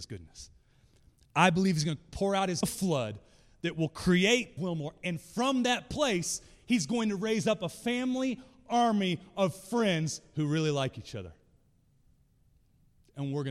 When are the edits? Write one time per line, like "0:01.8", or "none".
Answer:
0:02.6
0:04.6